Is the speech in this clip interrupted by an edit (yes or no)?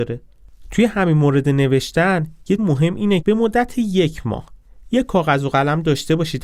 yes